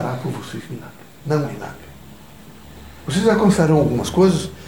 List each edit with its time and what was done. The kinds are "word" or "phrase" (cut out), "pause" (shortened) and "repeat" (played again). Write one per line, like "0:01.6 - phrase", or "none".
0:01.4 - word
0:03.0 - pause